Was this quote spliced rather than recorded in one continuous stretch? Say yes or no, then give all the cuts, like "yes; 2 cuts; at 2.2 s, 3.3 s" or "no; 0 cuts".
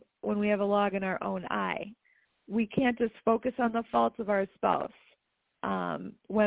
no; 0 cuts